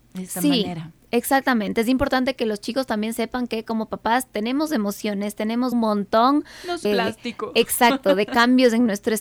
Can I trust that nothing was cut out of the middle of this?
no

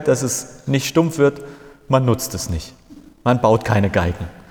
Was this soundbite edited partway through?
no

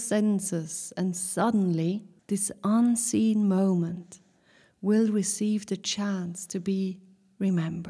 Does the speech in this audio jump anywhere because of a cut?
yes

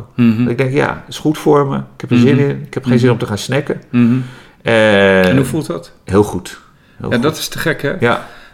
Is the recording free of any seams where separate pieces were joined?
yes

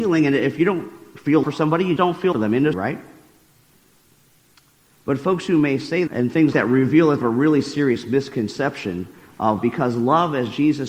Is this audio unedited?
no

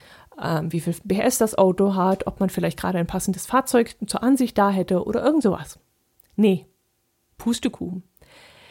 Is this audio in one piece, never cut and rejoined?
yes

